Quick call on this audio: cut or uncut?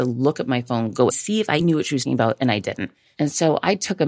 cut